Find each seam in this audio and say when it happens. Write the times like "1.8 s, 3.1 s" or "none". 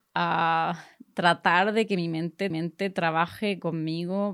2.5 s